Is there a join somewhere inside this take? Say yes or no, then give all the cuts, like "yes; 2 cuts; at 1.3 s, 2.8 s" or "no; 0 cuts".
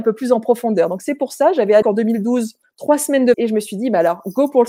yes; 3 cuts; at 1.8 s, 2.6 s, 3.3 s